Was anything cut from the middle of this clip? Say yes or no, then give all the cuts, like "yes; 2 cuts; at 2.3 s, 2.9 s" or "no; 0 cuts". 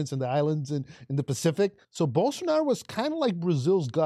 yes; 1 cut; at 1.8 s